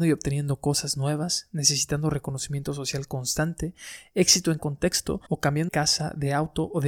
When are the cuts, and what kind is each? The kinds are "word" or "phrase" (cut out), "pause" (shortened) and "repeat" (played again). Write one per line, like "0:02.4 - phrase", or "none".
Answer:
0:04.6 - word
0:05.3 - pause
0:05.7 - phrase